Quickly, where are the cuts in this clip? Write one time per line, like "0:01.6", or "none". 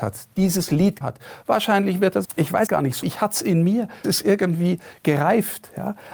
0:01.0
0:02.2
0:02.7
0:03.0
0:04.0